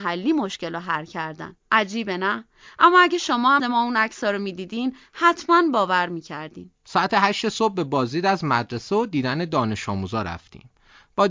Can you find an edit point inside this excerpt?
yes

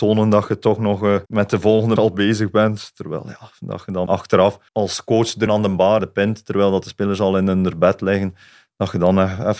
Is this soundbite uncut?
no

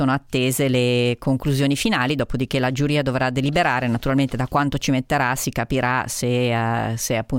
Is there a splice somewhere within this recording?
no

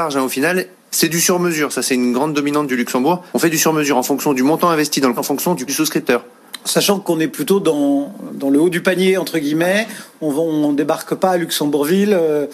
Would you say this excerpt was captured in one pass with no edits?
no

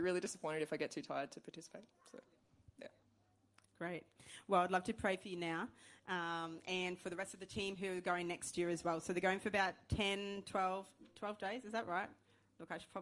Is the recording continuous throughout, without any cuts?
yes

